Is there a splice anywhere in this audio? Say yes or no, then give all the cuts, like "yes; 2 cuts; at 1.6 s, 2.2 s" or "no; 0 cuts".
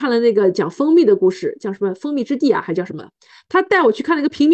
no; 0 cuts